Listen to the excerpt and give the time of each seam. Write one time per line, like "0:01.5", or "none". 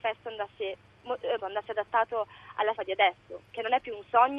0:01.4
0:02.8